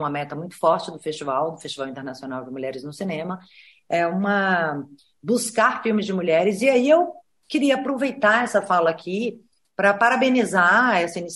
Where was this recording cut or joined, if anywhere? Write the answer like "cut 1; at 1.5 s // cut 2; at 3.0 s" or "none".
none